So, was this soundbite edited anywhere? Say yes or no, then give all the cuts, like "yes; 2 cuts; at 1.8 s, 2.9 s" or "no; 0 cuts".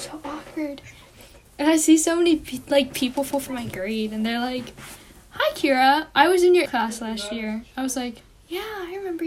yes; 2 cuts; at 3.3 s, 6.7 s